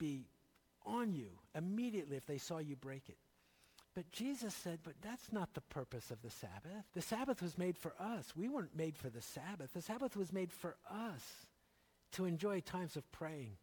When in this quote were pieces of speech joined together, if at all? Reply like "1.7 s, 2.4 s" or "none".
3.8 s, 6.9 s